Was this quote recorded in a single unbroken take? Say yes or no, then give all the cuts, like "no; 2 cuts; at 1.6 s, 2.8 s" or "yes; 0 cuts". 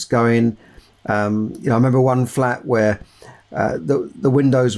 no; 1 cut; at 3.8 s